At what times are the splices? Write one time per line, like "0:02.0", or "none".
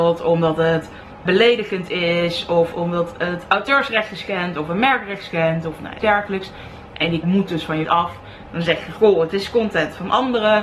0:01.3
0:06.0
0:07.2
0:07.8

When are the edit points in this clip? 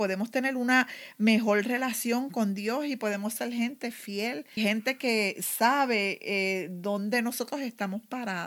0:04.6

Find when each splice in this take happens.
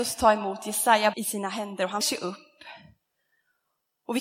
0:01.1
0:02.0

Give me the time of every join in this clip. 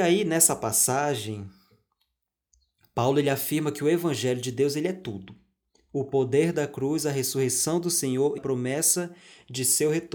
0:08.4

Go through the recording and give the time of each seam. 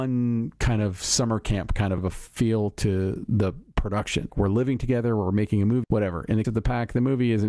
0:02.0
0:04.3
0:05.8
0:06.4

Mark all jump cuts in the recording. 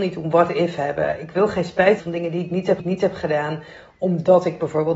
0:02.0
0:02.8

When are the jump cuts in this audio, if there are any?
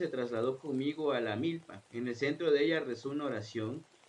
0:01.9

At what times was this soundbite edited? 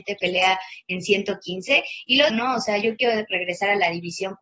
0:02.3

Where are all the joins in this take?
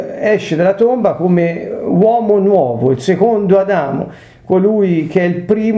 none

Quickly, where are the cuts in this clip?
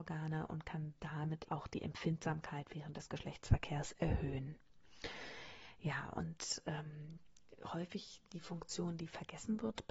0:01.4

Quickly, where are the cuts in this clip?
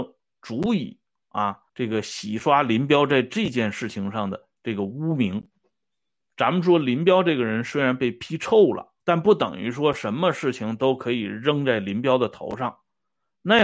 0:01.7
0:09.0

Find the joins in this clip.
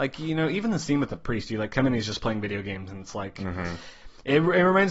none

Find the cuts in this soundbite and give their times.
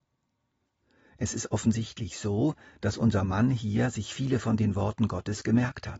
none

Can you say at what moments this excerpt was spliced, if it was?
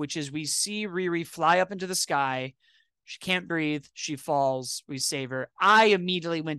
none

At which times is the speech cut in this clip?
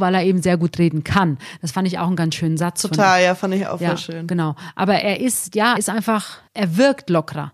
0:05.8
0:06.5

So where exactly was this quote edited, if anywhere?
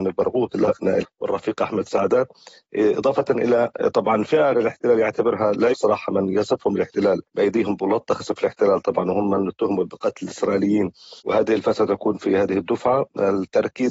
0:01.0
0:04.5
0:05.7
0:07.3
0:08.2
0:11.2

